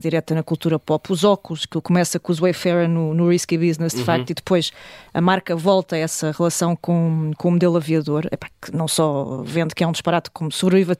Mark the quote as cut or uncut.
uncut